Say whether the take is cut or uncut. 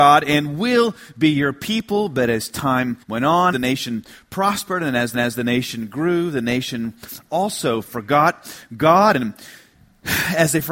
cut